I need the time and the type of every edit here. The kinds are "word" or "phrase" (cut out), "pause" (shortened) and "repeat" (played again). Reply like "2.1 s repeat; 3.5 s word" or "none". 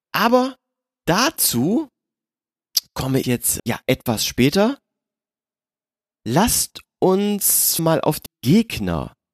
3.2 s word; 3.6 s word; 7.8 s word; 8.3 s word